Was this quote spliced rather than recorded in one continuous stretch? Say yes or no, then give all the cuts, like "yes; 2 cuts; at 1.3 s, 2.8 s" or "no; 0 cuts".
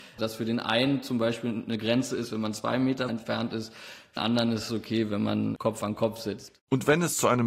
yes; 2 cuts; at 3.1 s, 4.2 s